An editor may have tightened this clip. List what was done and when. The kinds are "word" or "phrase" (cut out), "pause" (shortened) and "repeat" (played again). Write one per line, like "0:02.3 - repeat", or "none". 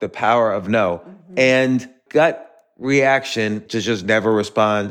0:02.1 - word
0:03.7 - word